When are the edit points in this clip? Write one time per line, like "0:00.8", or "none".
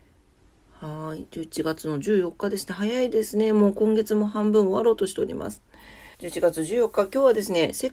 0:06.1

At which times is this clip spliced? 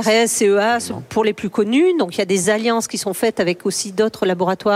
none

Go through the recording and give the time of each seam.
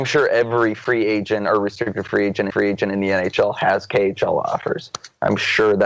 0:02.5

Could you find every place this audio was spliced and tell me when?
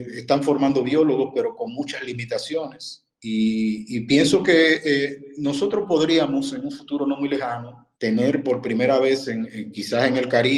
0:03.1
0:07.9

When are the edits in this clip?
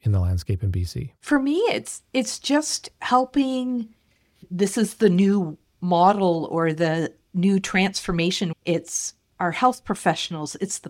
0:01.2

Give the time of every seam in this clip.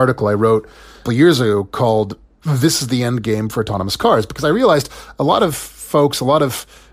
0:01.0

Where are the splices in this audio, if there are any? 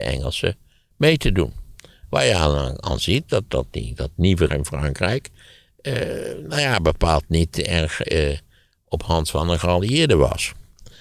0:03.5
0:04.5

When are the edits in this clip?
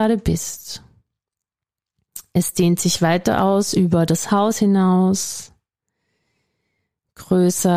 none

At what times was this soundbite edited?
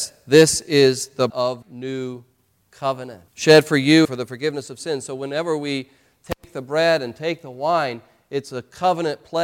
0:01.3
0:01.6
0:03.3
0:04.0

